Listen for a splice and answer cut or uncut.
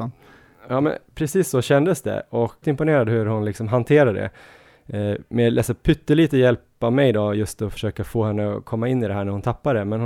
cut